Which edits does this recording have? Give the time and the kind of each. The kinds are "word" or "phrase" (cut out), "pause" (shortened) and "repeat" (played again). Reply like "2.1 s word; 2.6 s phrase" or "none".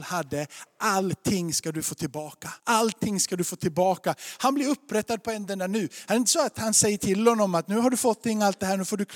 2.6 s pause